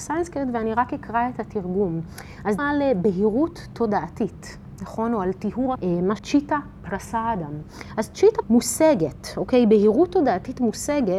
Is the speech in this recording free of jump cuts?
no; 4 cuts; at 2.6 s, 5.8 s, 6.2 s, 8.4 s

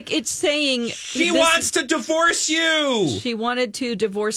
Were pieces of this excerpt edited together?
no; 0 cuts

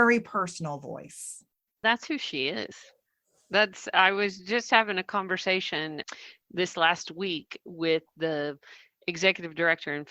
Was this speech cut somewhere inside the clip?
no; 0 cuts

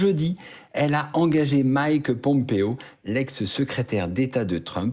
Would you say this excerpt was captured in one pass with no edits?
yes; 0 cuts

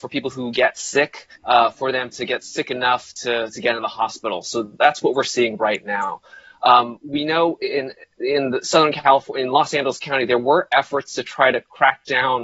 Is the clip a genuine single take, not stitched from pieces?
no; 1 cut; at 1.4 s

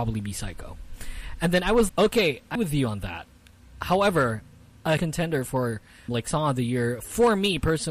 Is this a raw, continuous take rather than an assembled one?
no; 4 cuts; at 1.9 s, 2.6 s, 5.0 s, 6.1 s

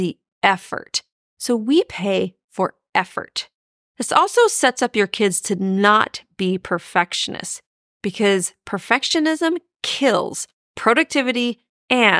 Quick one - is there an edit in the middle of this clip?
no; 0 cuts

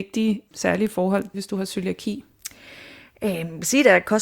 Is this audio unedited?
no; 1 cut; at 1.3 s

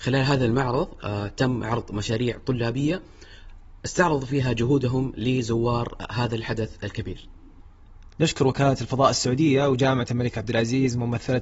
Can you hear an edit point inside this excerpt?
yes; 1 cut; at 3.8 s

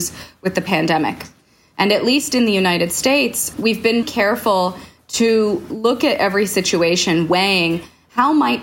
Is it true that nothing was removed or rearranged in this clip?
no; 2 cuts; at 3.5 s, 4.0 s

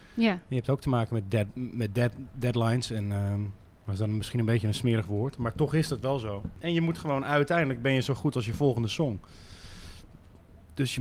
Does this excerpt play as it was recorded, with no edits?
yes; 0 cuts

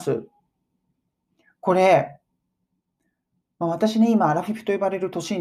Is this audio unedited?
yes; 0 cuts

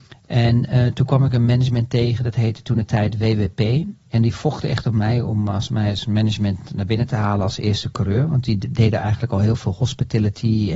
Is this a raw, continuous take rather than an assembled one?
yes; 0 cuts

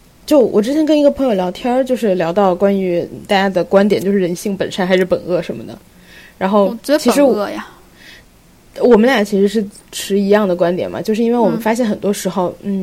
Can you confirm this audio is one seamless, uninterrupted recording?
yes; 0 cuts

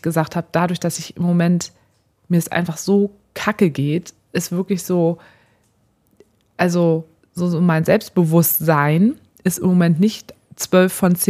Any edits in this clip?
yes; 1 cut; at 7.2 s

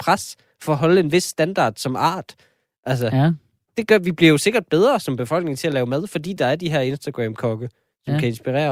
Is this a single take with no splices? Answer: yes; 0 cuts

